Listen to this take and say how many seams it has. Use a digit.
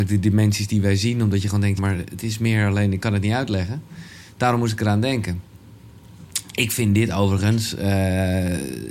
1